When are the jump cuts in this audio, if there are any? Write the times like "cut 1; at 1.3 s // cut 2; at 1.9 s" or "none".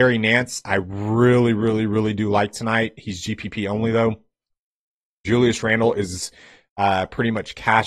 none